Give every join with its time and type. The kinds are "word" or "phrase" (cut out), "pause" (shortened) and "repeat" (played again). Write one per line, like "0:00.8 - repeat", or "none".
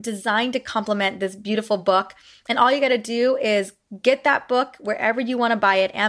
none